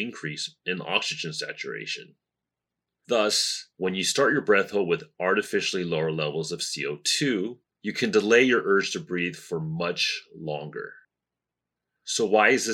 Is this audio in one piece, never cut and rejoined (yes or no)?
yes